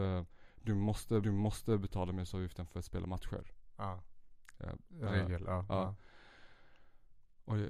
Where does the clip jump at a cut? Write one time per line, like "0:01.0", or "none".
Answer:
0:01.2